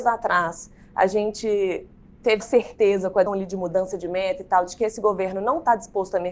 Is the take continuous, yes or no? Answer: no